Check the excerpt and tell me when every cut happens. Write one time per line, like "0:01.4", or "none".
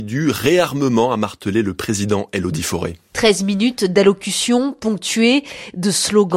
0:03.0